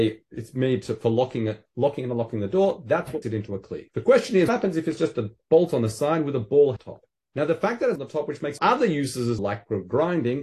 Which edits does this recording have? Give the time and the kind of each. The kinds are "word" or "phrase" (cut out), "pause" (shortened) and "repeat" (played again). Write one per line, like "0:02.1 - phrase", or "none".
0:03.2 - word
0:03.9 - pause
0:04.5 - word
0:06.8 - phrase
0:07.2 - pause
0:08.0 - phrase
0:08.6 - phrase
0:09.4 - word